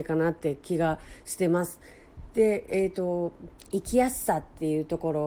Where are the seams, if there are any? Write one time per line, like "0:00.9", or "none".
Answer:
0:03.6